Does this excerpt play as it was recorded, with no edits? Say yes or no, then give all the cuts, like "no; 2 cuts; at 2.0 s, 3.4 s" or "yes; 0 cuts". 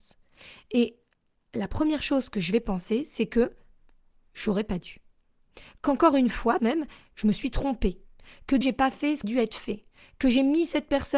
no; 3 cuts; at 6.6 s, 8.6 s, 9.2 s